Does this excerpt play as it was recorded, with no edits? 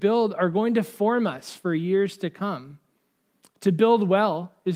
yes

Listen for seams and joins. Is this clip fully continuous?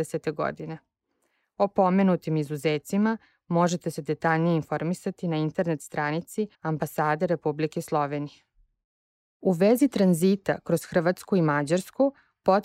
no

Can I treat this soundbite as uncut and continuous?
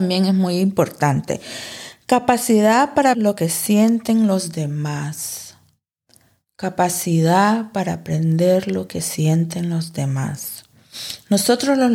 no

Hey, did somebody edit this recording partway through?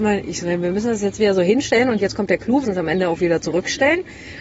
yes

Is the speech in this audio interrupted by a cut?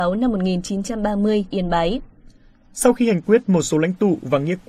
yes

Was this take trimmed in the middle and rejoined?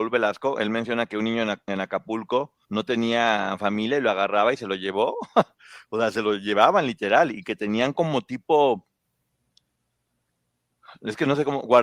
yes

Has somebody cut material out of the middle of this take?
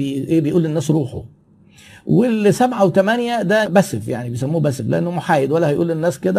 no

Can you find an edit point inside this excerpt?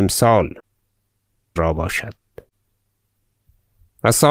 yes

